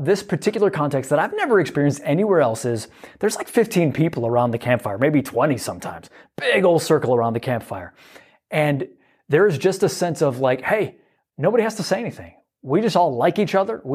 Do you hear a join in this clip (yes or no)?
no